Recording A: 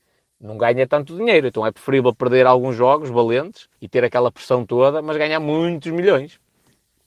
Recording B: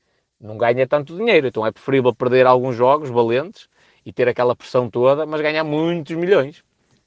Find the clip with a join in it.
A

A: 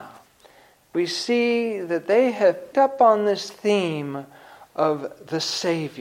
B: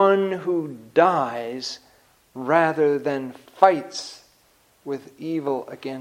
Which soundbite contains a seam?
A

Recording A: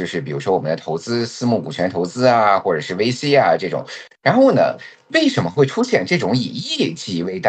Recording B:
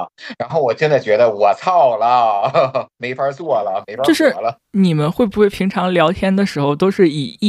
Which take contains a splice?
B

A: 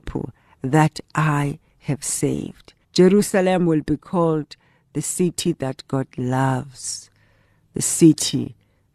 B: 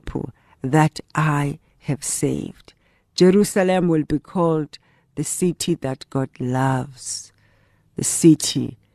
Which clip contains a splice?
A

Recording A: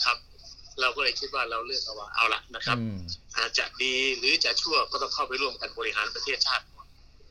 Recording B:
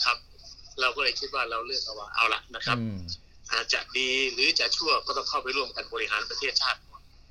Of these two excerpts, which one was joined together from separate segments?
A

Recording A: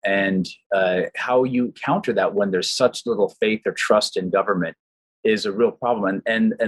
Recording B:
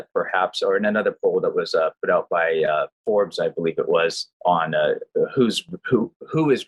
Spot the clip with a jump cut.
B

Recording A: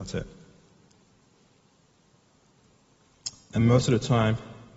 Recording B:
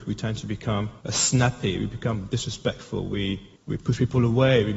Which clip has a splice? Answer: B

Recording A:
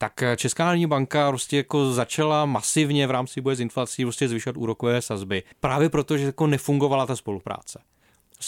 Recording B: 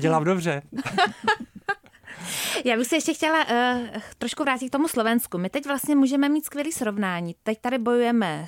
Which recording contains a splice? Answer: A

